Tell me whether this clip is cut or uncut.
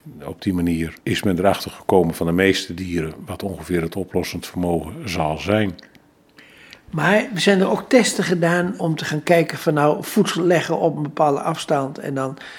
cut